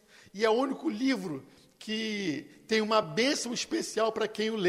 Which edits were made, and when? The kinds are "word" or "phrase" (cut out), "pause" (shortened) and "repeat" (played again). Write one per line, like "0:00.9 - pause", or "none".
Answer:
none